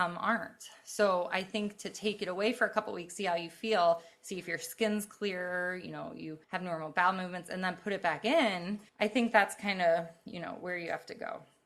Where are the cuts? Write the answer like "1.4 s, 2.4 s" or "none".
6.4 s, 8.9 s